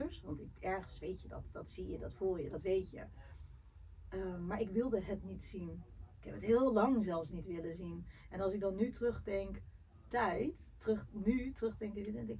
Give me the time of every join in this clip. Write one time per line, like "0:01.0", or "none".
0:10.1